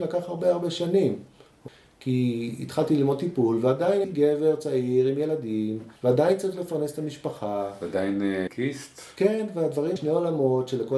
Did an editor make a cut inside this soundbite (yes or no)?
yes